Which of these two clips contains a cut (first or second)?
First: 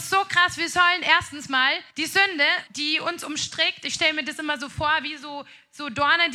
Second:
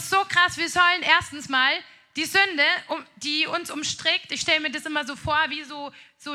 first